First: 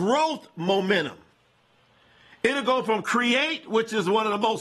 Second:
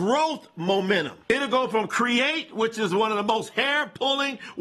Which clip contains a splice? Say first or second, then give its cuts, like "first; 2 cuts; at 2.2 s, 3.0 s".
second; 1 cut; at 1.2 s